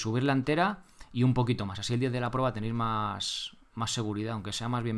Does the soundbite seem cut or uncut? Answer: uncut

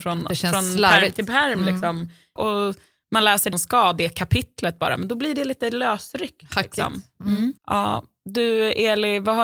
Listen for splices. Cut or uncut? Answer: cut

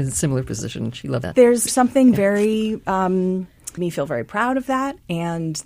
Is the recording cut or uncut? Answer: cut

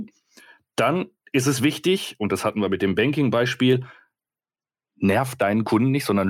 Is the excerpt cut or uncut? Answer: uncut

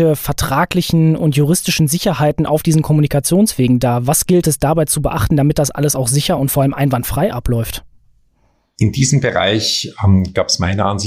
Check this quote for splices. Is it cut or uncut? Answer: uncut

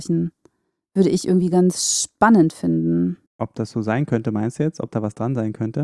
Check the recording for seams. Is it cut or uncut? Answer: cut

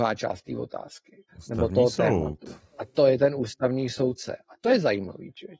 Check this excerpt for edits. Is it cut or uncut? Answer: cut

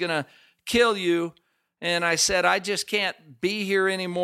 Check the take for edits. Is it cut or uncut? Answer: uncut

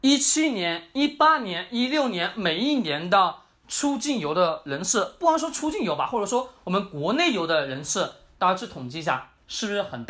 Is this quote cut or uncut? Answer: uncut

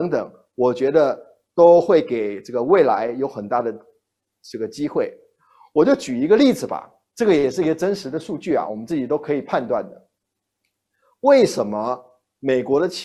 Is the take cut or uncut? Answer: uncut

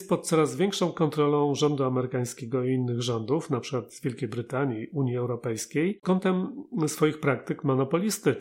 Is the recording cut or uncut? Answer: cut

